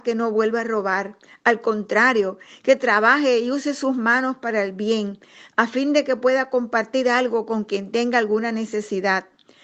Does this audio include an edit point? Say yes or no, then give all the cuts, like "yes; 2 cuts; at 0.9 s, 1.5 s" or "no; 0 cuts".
no; 0 cuts